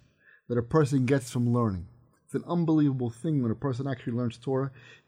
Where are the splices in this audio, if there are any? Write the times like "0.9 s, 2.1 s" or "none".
none